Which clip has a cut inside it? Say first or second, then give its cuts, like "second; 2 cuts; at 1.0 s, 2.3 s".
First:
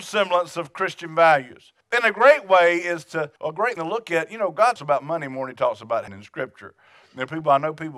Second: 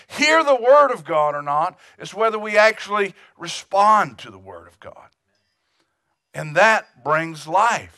first; 5 cuts; at 1.8 s, 3.4 s, 3.8 s, 4.8 s, 6.1 s